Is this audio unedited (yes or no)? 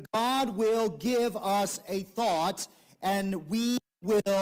yes